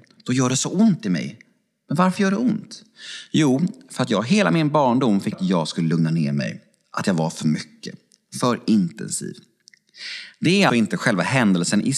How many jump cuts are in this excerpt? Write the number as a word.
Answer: two